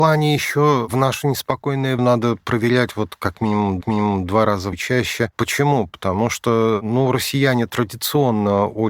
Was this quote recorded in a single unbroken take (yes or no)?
no